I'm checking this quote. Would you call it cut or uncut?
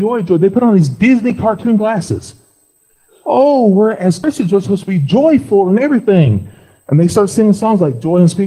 uncut